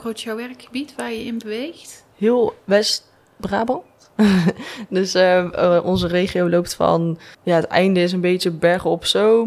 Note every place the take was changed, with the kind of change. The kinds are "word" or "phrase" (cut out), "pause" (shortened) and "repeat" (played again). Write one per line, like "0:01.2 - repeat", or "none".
0:07.3 - pause

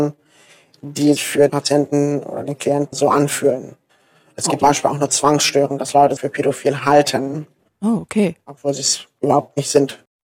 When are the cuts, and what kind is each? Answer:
0:01.2 - word
0:01.5 - word
0:02.9 - word
0:04.6 - word
0:06.2 - word

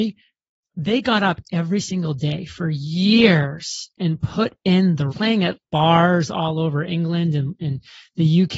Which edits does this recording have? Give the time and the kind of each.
0:05.1 - word
0:05.6 - phrase

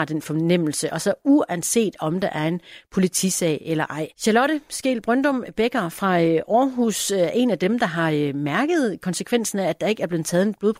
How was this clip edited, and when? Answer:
0:04.1 - pause

